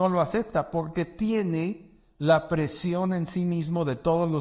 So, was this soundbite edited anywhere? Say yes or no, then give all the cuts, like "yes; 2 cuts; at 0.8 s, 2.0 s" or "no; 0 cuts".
no; 0 cuts